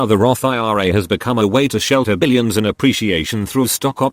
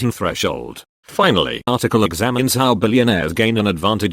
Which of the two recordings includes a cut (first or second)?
second